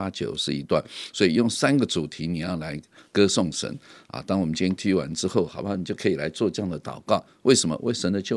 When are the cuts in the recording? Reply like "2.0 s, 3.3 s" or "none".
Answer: 4.8 s